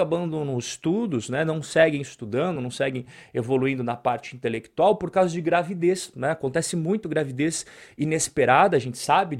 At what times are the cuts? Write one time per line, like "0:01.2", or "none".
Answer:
none